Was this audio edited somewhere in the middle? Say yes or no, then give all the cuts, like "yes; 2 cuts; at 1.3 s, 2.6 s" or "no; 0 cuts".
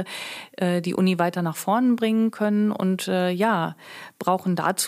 no; 0 cuts